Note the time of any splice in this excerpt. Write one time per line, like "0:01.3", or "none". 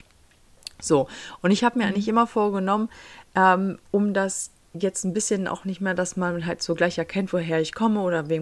none